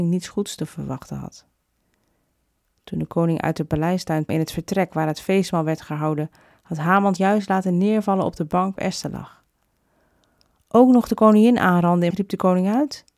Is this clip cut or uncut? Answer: cut